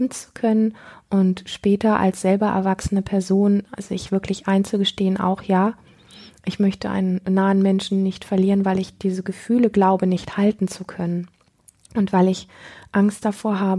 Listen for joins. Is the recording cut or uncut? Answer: uncut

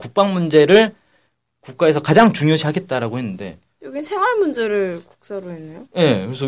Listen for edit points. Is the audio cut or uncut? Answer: uncut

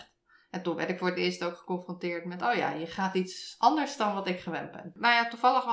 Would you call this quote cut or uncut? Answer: uncut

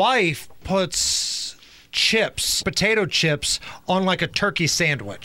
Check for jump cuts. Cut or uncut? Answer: cut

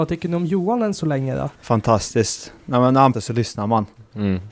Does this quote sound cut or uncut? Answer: cut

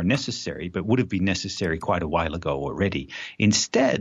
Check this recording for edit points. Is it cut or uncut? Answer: uncut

